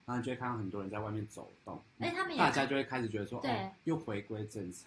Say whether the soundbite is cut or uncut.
uncut